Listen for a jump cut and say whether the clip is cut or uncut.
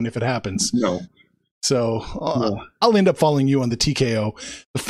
uncut